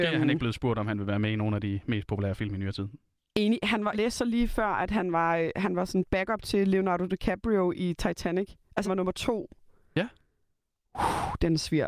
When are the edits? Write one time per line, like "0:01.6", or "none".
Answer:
0:03.9
0:08.8